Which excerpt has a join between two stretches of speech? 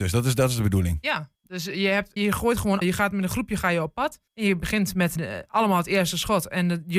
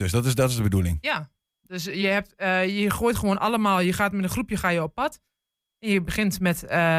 first; 5 cuts; at 1.3 s, 2.2 s, 2.8 s, 4.3 s, 5.2 s

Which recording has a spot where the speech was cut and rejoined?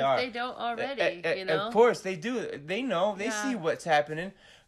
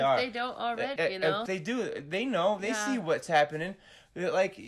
second; 2 cuts; at 1.0 s, 1.5 s

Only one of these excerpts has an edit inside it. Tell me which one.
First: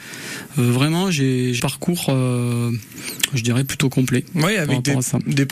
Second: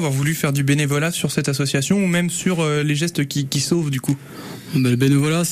first; 1 cut; at 1.6 s

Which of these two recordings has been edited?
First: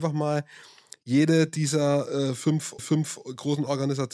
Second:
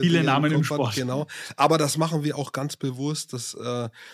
first; 1 cut; at 2.8 s

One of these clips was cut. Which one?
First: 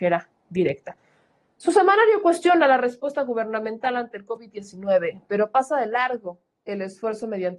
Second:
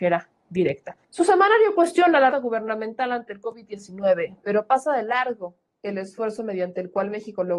second; 2 cuts; at 1.0 s, 2.3 s

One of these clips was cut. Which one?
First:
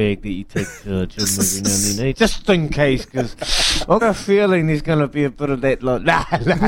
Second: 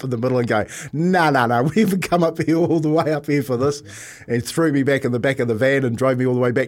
first; 2 cuts; at 2.1 s, 4.0 s

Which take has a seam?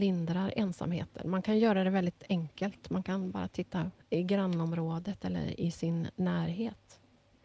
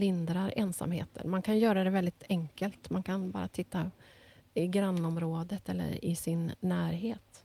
first; 1 cut; at 4.0 s

